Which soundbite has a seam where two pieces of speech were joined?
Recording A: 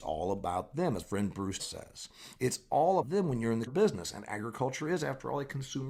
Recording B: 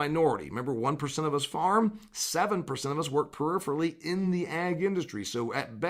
A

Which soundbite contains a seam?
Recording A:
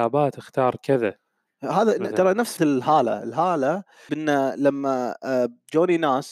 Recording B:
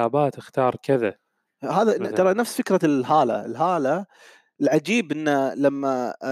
A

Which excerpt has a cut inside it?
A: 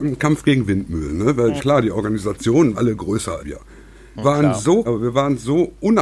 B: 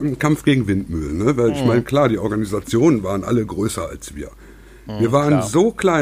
A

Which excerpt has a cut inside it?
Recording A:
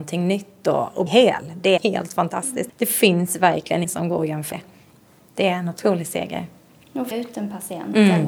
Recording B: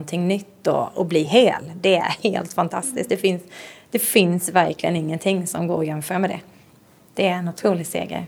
A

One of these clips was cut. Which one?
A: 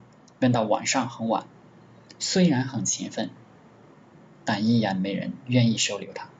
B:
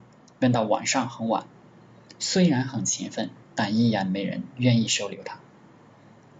B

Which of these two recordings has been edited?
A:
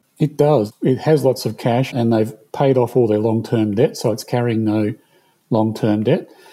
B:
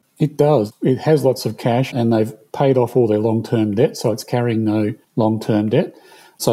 B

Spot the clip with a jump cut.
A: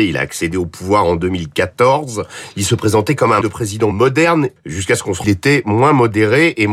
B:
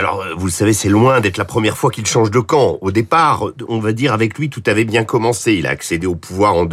A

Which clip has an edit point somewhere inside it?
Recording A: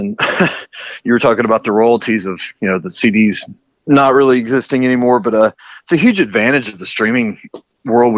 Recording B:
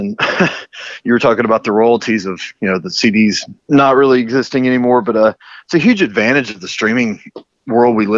B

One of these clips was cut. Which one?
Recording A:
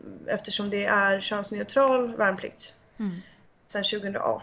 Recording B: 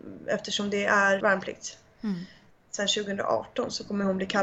B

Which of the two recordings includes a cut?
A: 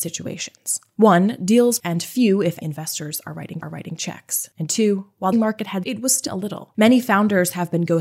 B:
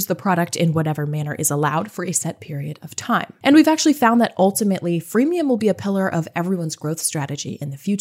A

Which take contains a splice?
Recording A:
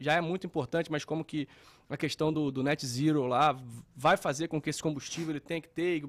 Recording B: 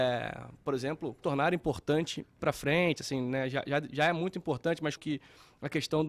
B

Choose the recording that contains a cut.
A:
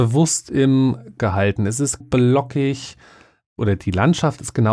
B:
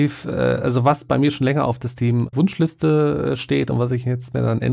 A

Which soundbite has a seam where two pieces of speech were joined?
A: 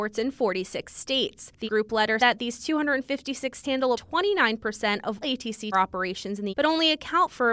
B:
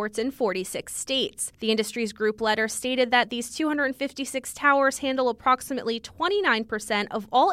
A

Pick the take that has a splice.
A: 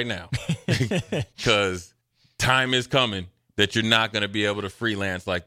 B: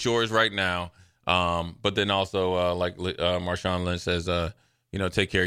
A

